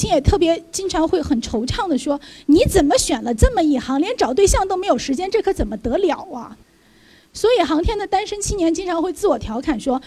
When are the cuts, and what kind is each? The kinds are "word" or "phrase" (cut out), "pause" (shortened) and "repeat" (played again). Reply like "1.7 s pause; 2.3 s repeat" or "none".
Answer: 6.6 s pause